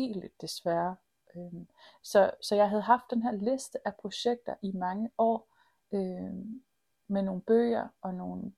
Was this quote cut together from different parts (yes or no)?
no